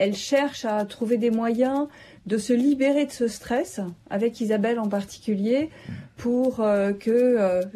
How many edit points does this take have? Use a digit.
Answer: 0